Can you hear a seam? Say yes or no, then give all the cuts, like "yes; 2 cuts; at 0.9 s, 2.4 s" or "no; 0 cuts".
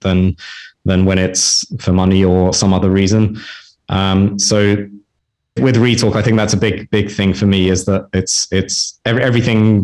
yes; 2 cuts; at 2.5 s, 5.6 s